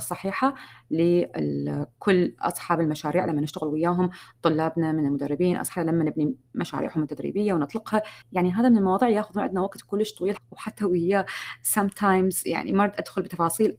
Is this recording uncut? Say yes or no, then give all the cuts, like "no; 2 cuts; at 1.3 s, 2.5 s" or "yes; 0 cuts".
no; 3 cuts; at 5.8 s, 8.2 s, 10.4 s